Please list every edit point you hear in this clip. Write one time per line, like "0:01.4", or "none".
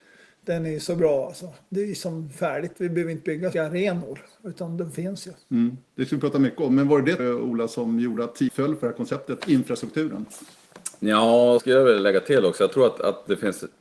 0:03.5
0:07.2
0:08.5
0:09.4
0:11.6